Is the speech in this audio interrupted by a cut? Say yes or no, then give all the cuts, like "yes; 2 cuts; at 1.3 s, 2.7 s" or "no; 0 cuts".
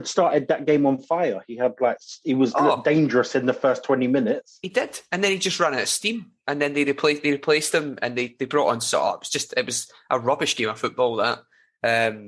no; 0 cuts